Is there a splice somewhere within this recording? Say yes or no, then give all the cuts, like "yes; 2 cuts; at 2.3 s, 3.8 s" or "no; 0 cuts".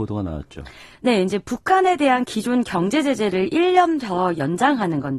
no; 0 cuts